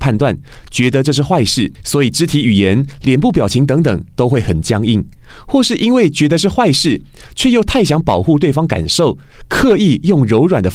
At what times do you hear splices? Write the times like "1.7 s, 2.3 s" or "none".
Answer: 1.7 s